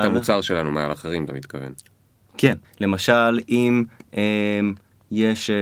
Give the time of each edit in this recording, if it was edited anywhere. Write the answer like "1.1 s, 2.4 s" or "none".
2.6 s